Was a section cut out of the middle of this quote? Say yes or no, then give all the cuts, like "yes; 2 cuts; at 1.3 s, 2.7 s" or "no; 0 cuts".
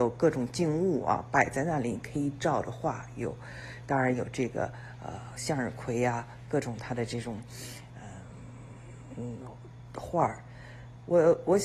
no; 0 cuts